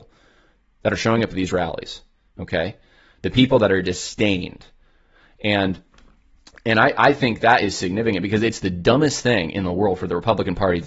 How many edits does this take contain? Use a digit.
0